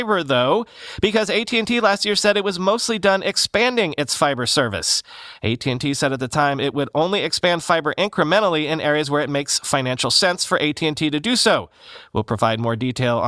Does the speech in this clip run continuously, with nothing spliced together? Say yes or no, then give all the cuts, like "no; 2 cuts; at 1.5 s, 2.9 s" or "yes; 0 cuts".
yes; 0 cuts